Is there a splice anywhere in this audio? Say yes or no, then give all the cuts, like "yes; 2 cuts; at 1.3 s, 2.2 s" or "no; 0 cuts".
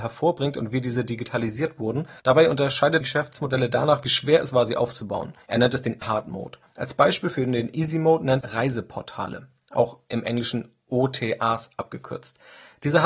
yes; 6 cuts; at 2.2 s, 3.0 s, 5.4 s, 6.0 s, 6.7 s, 8.4 s